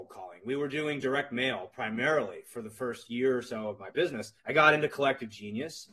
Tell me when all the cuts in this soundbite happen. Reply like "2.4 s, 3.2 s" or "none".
4.4 s